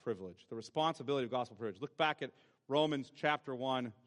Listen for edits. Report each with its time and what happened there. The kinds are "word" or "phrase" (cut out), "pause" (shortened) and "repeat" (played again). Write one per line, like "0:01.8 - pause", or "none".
none